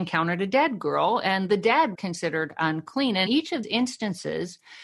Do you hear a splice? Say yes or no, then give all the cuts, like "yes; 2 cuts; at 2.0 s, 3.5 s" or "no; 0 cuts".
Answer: yes; 3 cuts; at 1.9 s, 3.3 s, 3.6 s